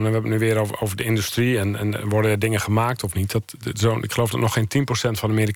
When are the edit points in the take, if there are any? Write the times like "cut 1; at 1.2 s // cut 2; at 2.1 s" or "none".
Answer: none

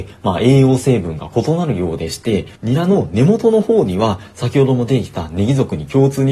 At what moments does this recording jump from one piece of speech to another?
cut 1; at 2.6 s

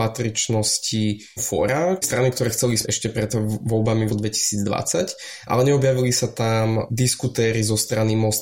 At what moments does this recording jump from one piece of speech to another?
cut 1; at 1.4 s // cut 2; at 2.0 s // cut 3; at 2.8 s // cut 4; at 4.1 s

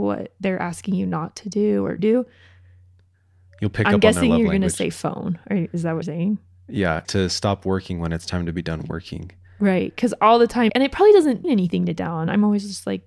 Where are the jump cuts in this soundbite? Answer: cut 1; at 2.0 s // cut 2; at 6.0 s // cut 3; at 7.0 s // cut 4; at 10.7 s // cut 5; at 11.4 s

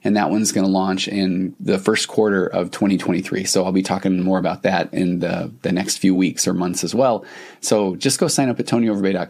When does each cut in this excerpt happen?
none

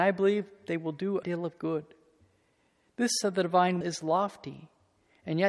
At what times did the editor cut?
cut 1; at 1.2 s // cut 2; at 3.2 s // cut 3; at 3.8 s

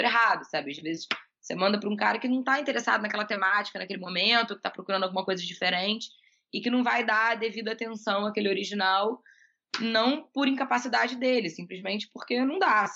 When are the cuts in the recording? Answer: none

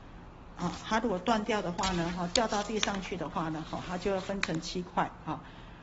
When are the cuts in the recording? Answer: none

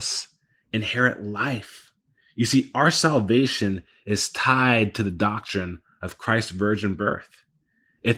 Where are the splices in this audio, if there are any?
none

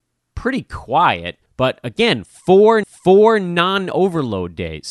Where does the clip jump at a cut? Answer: cut 1; at 1.5 s // cut 2; at 2.8 s

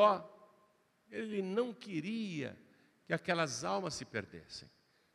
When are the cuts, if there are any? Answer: none

